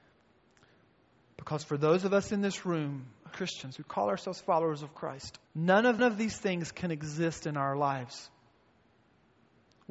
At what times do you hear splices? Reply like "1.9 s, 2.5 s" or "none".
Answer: 3.3 s, 5.5 s, 6.0 s